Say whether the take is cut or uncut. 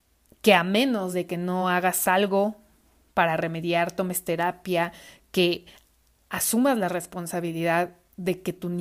uncut